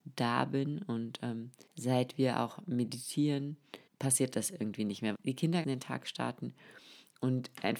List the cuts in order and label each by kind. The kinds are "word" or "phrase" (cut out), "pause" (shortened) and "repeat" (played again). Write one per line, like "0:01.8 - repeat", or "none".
0:01.7 - pause
0:03.9 - pause
0:05.1 - phrase
0:05.6 - phrase